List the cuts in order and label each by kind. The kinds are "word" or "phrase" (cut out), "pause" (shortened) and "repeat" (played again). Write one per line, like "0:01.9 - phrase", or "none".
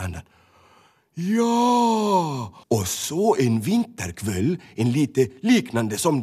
0:02.6 - pause